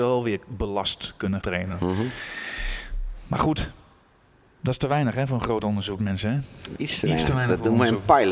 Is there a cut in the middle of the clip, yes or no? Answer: yes